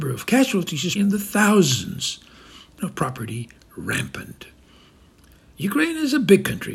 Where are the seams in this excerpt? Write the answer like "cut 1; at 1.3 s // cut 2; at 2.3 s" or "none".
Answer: cut 1; at 1.0 s // cut 2; at 2.8 s